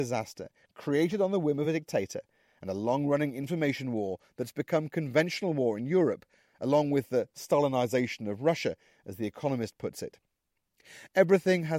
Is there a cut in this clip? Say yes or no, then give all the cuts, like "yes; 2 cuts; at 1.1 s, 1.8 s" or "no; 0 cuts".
no; 0 cuts